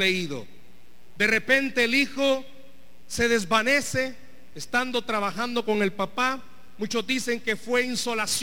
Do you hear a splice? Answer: no; 0 cuts

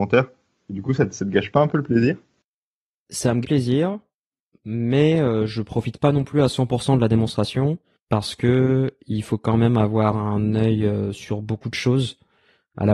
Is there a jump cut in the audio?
yes; 2 cuts; at 3.0 s, 3.4 s

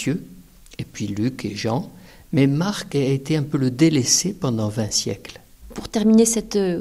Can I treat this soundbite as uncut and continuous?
yes; 0 cuts

